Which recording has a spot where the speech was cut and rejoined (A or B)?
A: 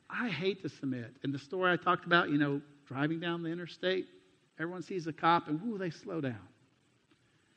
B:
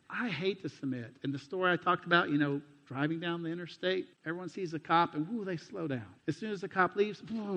B